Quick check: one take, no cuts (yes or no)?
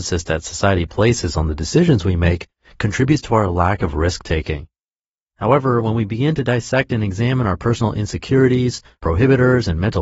yes